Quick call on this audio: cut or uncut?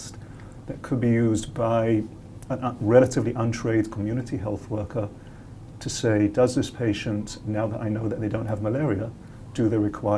uncut